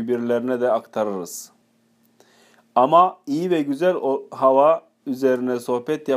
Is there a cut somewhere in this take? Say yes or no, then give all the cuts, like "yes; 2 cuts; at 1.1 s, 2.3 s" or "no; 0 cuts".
no; 0 cuts